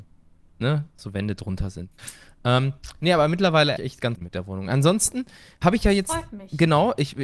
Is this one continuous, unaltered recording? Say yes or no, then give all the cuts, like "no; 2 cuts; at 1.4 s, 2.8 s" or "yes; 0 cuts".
no; 3 cuts; at 3.8 s, 4.2 s, 5.6 s